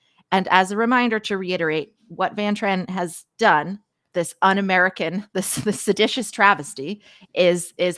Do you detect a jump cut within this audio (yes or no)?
yes